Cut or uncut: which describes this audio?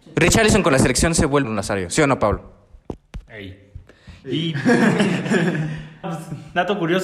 cut